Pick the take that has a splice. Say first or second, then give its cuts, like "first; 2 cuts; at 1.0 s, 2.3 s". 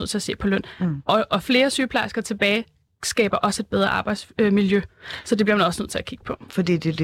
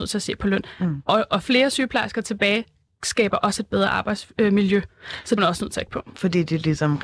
second; 2 cuts; at 5.4 s, 5.9 s